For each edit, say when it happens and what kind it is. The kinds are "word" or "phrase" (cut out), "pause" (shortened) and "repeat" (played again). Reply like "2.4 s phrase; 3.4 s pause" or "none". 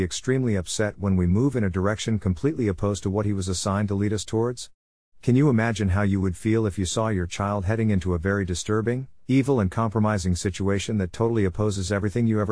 none